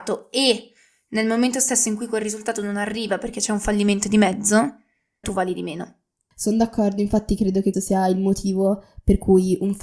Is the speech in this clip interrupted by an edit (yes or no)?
yes